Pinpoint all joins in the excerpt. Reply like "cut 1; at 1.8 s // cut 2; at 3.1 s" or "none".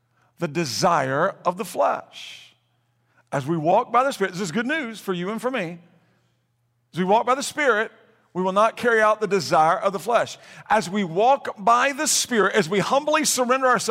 none